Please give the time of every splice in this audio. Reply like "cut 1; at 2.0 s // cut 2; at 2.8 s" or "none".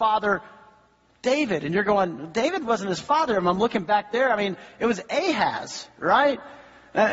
cut 1; at 2.7 s